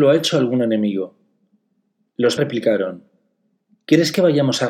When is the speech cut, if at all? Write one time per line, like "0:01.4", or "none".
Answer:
0:02.4